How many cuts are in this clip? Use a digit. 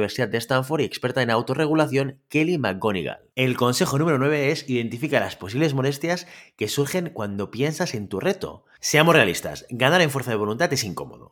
1